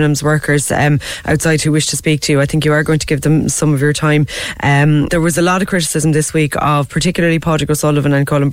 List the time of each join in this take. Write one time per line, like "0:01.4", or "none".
0:05.1